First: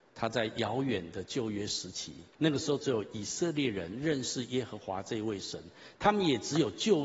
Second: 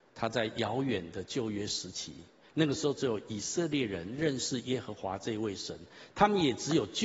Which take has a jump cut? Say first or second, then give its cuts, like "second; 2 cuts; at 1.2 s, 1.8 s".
first; 1 cut; at 2.3 s